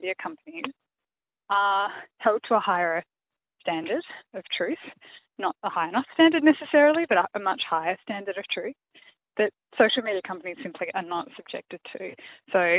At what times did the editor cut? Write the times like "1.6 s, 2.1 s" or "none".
none